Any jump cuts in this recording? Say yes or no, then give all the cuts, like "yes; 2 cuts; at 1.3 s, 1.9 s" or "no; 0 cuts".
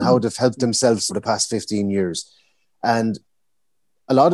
yes; 1 cut; at 1.1 s